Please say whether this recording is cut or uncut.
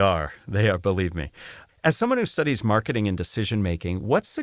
uncut